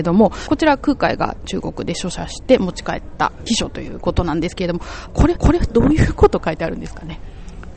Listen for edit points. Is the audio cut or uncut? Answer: cut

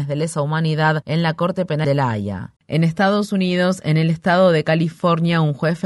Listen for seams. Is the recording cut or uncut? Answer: cut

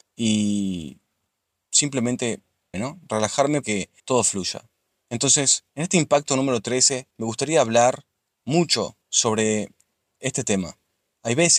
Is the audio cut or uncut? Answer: cut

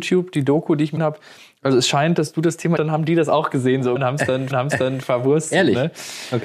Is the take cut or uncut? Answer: cut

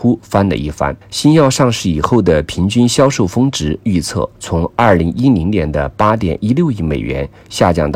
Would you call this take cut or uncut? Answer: cut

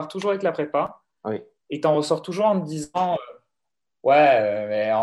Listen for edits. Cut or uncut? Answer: uncut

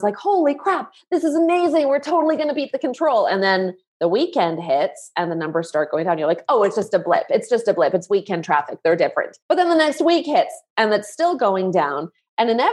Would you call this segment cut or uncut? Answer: cut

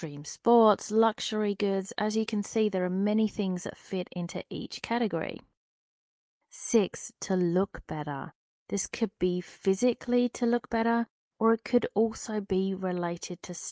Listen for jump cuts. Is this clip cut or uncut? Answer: uncut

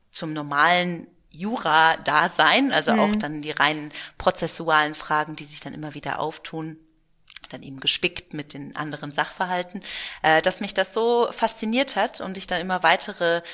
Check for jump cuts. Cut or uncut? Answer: uncut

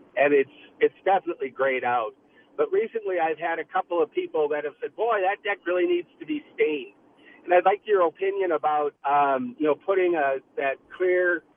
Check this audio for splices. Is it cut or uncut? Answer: cut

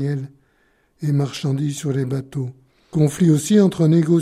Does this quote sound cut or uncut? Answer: uncut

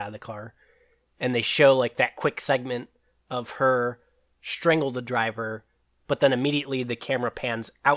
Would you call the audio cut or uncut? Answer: uncut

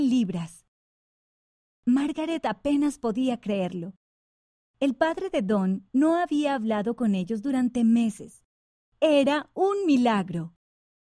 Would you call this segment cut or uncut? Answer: uncut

